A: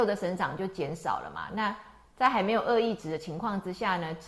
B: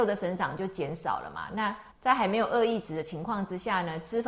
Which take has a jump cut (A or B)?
B